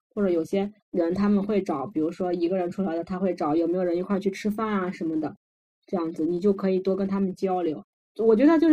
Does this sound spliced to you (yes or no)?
no